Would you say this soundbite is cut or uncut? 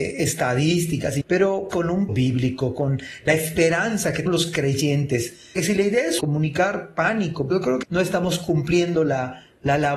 cut